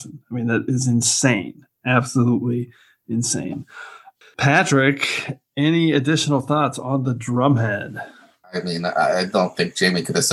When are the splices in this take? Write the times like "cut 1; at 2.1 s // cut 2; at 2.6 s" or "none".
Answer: none